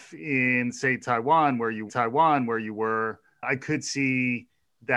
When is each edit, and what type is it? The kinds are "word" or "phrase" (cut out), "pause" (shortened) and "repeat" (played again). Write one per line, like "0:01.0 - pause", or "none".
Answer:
0:01.9 - repeat